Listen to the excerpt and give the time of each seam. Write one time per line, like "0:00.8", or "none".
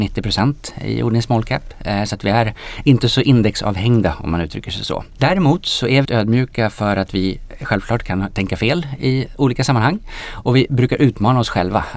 0:06.0